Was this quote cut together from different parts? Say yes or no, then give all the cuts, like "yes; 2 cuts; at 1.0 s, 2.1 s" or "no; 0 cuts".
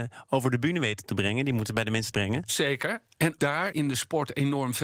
yes; 3 cuts; at 2.1 s, 3.4 s, 3.7 s